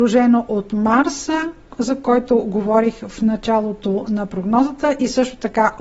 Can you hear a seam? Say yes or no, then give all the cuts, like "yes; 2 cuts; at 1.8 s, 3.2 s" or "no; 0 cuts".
no; 0 cuts